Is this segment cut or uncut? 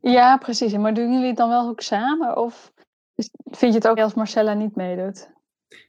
cut